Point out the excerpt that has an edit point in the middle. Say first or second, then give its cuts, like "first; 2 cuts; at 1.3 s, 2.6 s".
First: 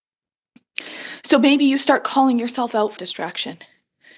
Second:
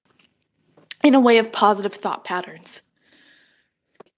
first; 1 cut; at 3.0 s